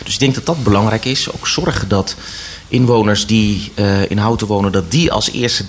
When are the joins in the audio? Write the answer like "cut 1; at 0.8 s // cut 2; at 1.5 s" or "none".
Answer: none